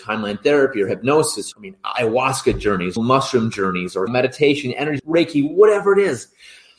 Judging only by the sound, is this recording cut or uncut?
cut